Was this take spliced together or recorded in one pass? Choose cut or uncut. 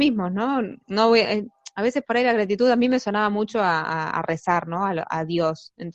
uncut